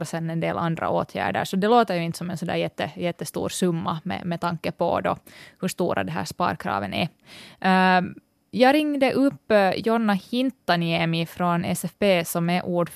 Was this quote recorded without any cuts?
yes; 0 cuts

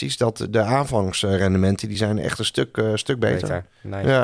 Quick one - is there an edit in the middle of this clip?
no; 0 cuts

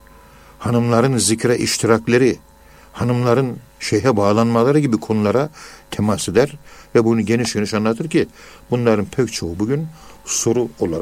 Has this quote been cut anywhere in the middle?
no; 0 cuts

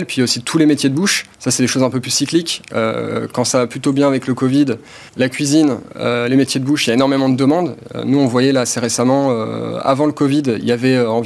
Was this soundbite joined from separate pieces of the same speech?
yes; 2 cuts; at 1.3 s, 5.1 s

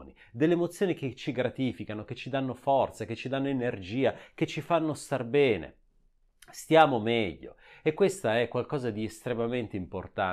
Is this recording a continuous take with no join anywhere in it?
yes; 0 cuts

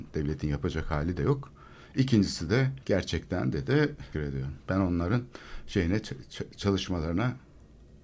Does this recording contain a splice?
yes; 3 cuts; at 2.8 s, 4.1 s, 4.6 s

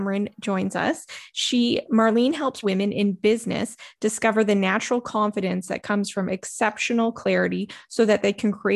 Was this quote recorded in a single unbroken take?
no; 1 cut; at 2.6 s

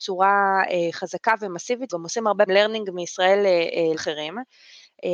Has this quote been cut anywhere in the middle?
yes; 3 cuts; at 1.9 s, 2.5 s, 3.9 s

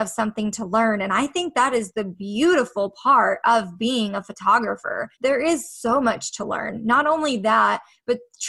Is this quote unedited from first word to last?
no; 1 cut; at 5.1 s

